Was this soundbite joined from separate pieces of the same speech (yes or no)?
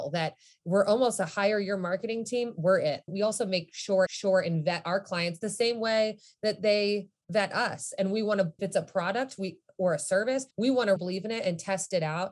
yes